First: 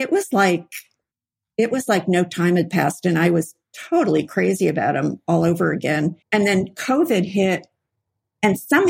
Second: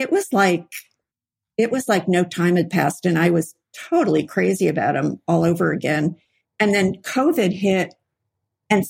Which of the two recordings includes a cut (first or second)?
first